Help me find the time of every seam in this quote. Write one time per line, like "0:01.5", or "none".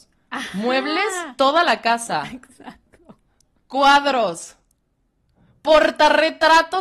0:01.4